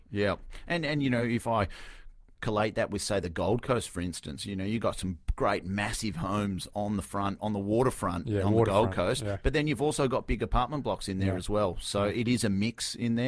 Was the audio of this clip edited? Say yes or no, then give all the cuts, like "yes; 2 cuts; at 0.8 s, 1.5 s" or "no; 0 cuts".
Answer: no; 0 cuts